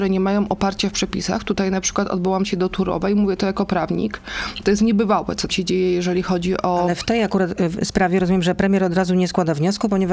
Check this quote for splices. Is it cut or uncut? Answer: cut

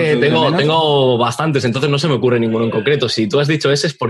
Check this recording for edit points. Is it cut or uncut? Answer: uncut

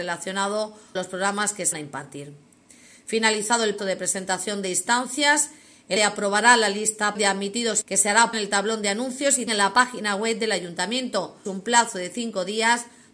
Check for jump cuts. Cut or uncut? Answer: cut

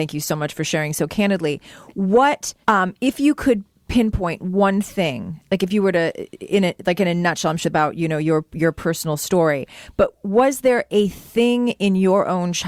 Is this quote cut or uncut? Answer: cut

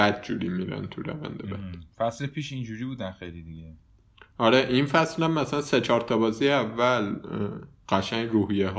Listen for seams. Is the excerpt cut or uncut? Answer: uncut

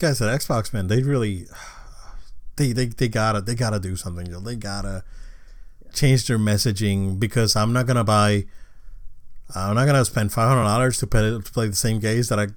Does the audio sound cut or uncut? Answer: uncut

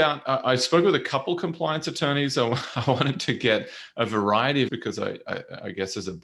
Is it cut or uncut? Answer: cut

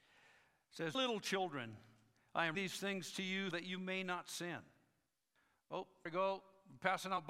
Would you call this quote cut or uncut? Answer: cut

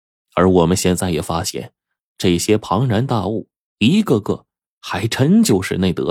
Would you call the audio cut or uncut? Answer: uncut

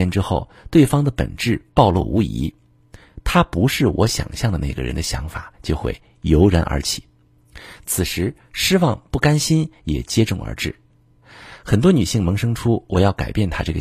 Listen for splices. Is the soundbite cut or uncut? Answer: uncut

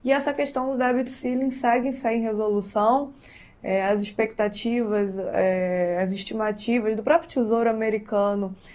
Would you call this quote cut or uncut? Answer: uncut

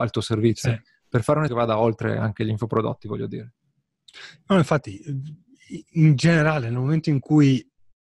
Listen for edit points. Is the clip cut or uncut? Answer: cut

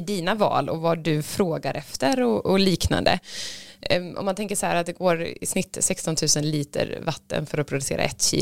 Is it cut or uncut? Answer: uncut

